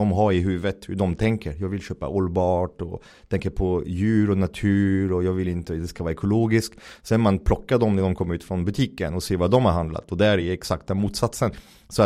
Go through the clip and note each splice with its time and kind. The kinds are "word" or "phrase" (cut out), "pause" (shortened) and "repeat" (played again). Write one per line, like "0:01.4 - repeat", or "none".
none